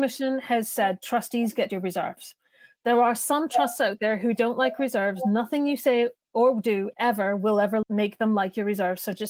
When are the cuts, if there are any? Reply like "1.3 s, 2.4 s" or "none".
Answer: 1.7 s, 7.8 s